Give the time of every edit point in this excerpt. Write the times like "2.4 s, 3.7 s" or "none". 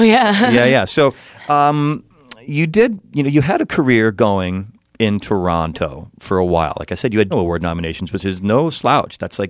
7.3 s